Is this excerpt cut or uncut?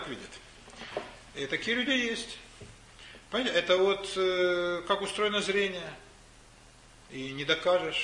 uncut